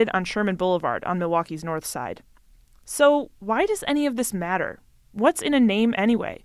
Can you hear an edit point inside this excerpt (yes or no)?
no